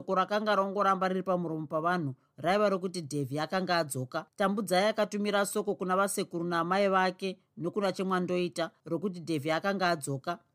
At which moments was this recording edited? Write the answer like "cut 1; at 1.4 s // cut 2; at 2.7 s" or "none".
cut 1; at 4.3 s